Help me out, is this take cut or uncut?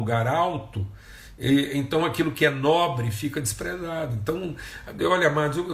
uncut